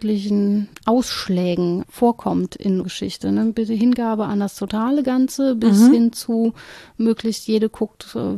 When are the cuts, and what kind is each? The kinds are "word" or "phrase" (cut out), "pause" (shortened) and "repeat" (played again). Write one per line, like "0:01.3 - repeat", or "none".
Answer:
0:01.8 - word
0:02.8 - word

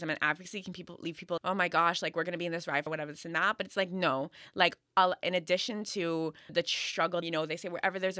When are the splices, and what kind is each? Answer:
0:01.4 - word
0:02.9 - word
0:06.5 - word
0:07.2 - phrase

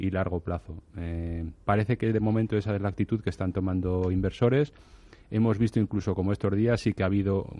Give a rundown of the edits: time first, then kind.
0:01.6 - pause

